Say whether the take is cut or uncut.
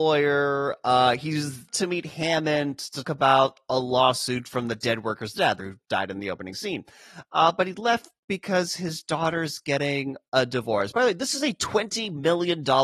cut